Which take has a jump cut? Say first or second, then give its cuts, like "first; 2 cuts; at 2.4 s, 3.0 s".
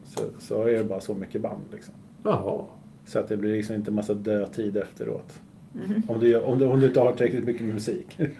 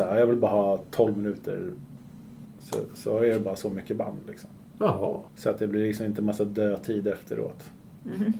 second; 1 cut; at 5.3 s